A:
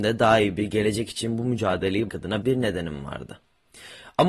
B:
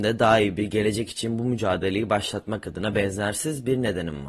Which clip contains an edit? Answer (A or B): A